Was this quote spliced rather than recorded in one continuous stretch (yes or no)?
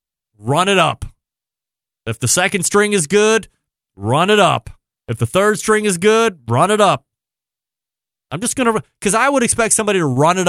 no